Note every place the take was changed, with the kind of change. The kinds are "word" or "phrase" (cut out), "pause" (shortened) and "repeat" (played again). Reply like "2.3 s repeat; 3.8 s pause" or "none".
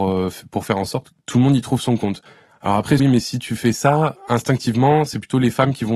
1.1 s word; 3.0 s phrase; 4.1 s word

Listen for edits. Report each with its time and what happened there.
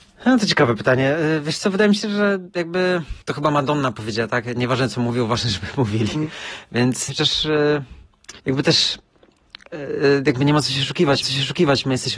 3.2 s pause; 7.1 s phrase; 8.4 s pause; 11.2 s repeat

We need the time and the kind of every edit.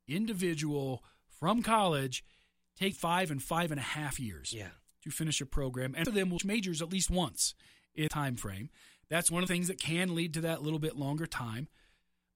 2.9 s word; 6.0 s word; 6.4 s word; 8.1 s word; 9.5 s word

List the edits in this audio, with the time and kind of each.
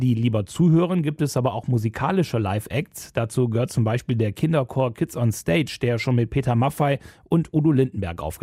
none

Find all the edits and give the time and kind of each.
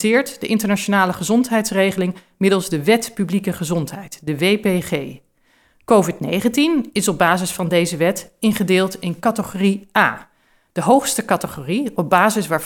none

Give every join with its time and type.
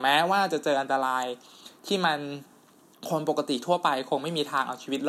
none

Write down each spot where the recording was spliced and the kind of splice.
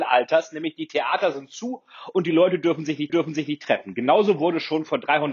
3.1 s repeat

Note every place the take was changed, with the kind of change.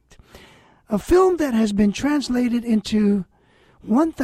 none

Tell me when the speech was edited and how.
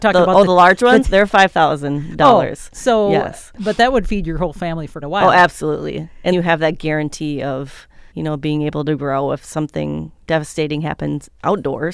1.0 s phrase; 5.0 s word; 6.3 s word; 8.1 s pause

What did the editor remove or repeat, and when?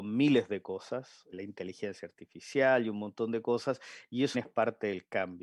1.3 s word; 4.3 s word

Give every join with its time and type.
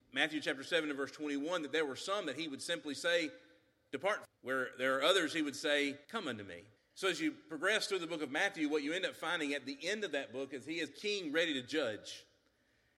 4.3 s phrase; 6.0 s pause; 6.8 s pause; 10.9 s word

